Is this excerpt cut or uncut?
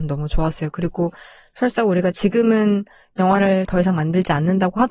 uncut